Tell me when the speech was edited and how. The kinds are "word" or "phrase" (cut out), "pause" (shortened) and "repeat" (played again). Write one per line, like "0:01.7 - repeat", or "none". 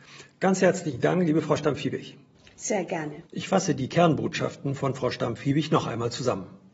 0:02.3 - pause
0:03.3 - pause